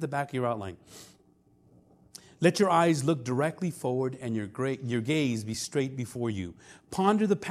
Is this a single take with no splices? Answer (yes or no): yes